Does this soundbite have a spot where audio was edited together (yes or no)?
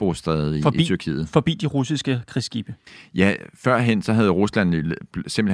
no